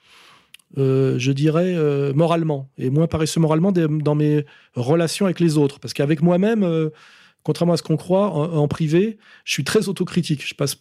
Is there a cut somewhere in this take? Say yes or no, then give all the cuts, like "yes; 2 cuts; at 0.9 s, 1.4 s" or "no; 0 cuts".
no; 0 cuts